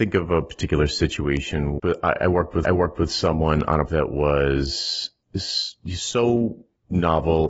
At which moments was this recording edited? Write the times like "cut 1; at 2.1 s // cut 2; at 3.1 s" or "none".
cut 1; at 1.8 s // cut 2; at 2.6 s // cut 3; at 3.9 s